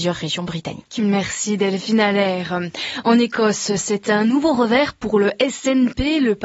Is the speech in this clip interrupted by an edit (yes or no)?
no